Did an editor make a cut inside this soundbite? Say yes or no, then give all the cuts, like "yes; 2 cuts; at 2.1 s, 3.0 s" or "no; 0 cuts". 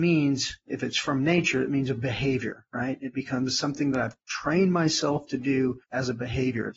yes; 1 cut; at 5.8 s